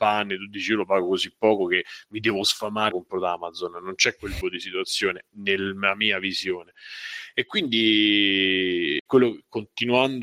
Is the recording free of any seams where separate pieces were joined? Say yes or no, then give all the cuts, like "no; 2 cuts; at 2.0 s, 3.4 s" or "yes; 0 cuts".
no; 3 cuts; at 2.9 s, 4.4 s, 9.1 s